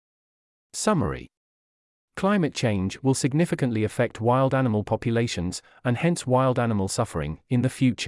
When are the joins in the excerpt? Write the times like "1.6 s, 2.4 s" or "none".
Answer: none